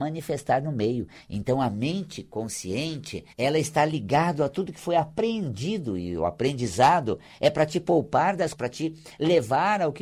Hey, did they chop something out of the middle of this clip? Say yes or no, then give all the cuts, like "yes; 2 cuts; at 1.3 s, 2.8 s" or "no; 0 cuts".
yes; 2 cuts; at 3.3 s, 8.5 s